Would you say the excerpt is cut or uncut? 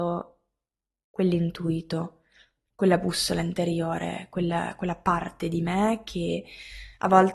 uncut